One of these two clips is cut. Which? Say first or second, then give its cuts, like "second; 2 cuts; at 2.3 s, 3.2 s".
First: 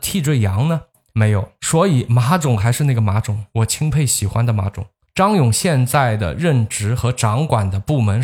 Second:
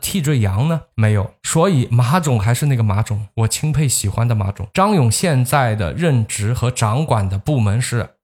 second; 2 cuts; at 0.9 s, 4.7 s